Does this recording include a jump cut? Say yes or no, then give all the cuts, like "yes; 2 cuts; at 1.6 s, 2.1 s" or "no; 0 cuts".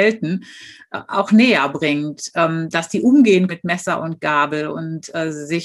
yes; 1 cut; at 3.5 s